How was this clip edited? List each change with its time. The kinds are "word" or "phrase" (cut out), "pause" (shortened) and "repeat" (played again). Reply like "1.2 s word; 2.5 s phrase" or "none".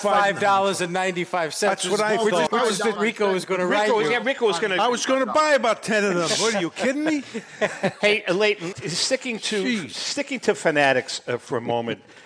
2.5 s word; 3.0 s phrase; 8.7 s word